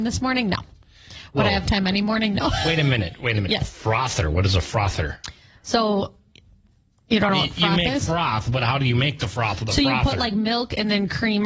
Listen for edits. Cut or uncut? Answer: uncut